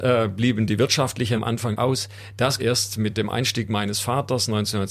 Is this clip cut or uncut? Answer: cut